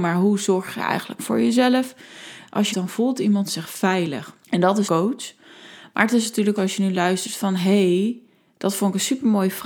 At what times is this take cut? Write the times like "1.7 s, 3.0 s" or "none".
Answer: 2.7 s, 4.4 s, 4.9 s, 6.6 s